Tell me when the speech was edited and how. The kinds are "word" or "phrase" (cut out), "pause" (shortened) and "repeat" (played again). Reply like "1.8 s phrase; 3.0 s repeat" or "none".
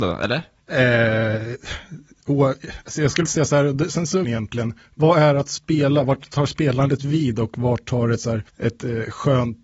3.3 s word; 4.2 s phrase; 8.5 s pause